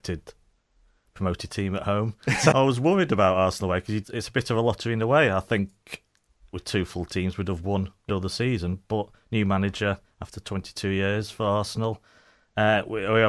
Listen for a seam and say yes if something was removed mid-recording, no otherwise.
yes